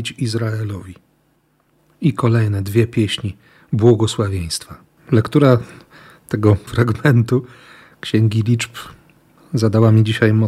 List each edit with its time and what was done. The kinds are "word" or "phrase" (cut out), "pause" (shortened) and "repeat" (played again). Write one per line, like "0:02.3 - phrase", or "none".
0:05.0 - pause
0:06.7 - word